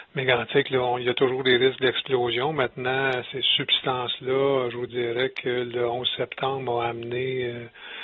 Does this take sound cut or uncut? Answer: uncut